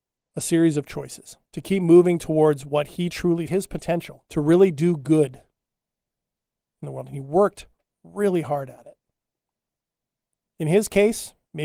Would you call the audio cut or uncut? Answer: cut